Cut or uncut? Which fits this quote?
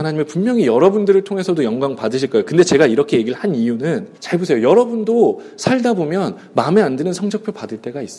cut